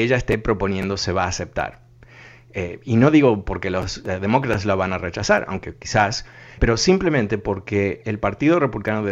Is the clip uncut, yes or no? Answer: no